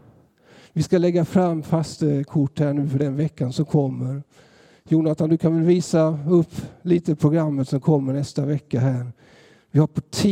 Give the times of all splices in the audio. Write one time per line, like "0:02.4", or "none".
none